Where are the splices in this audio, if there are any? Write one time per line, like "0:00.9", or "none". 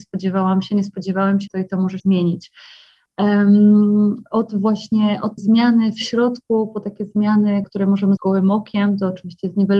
0:01.5
0:02.0
0:05.4
0:07.6
0:08.2